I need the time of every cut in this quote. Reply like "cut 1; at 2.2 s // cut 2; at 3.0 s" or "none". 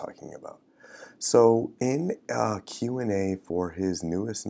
none